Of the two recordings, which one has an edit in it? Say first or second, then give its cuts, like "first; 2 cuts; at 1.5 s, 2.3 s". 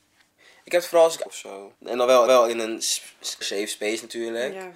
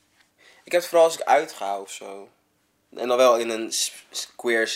first; 4 cuts; at 1.3 s, 1.7 s, 2.3 s, 3.4 s